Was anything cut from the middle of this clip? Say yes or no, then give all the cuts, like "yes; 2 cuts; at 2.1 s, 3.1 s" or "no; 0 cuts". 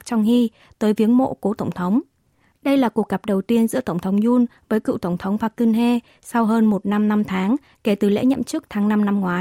no; 0 cuts